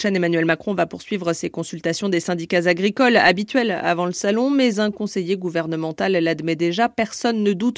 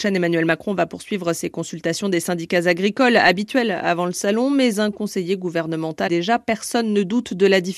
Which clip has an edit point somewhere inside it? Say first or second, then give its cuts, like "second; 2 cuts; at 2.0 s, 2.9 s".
second; 1 cut; at 6.1 s